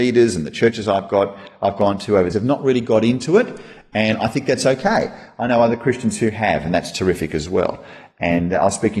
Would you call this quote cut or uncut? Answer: cut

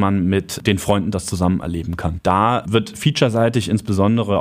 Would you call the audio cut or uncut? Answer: uncut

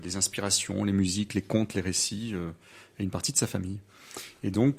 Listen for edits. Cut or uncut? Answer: uncut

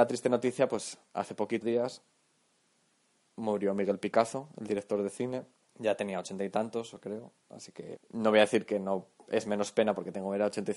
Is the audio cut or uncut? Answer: cut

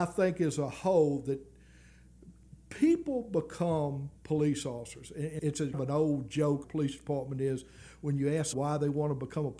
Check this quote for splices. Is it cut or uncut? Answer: cut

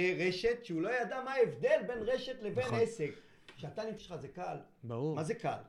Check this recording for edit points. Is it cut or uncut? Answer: cut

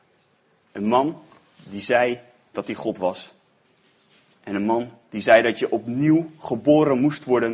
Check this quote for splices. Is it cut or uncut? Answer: uncut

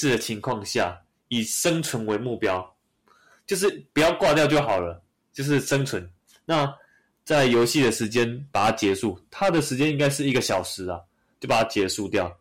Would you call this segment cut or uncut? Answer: uncut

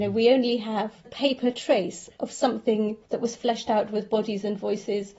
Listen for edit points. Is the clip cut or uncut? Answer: cut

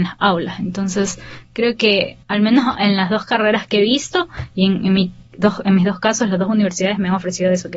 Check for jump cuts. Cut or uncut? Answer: cut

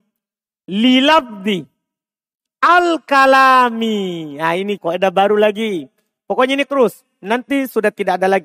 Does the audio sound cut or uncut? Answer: cut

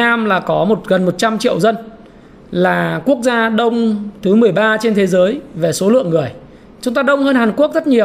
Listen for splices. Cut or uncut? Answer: uncut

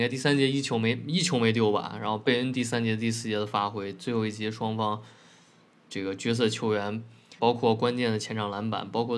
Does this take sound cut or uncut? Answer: cut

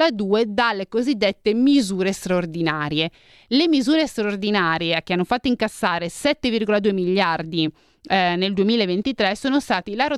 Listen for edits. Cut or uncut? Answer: uncut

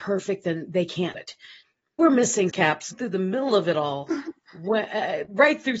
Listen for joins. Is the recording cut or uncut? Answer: cut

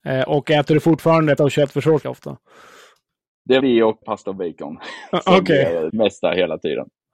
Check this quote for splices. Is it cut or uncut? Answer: cut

